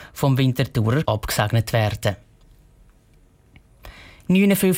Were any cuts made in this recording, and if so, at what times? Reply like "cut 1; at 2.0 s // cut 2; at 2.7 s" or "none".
cut 1; at 1.0 s